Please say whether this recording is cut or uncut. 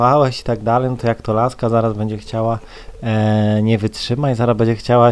uncut